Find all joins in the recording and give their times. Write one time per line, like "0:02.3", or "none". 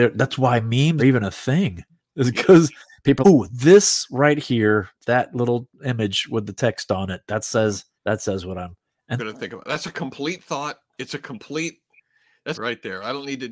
0:01.0
0:01.9
0:03.2
0:05.0
0:07.9
0:09.2
0:12.5